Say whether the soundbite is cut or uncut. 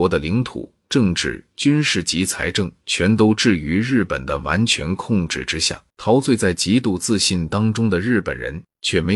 cut